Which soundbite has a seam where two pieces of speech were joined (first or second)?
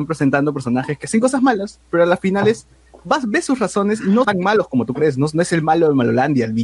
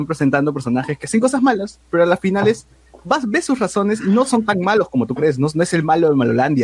first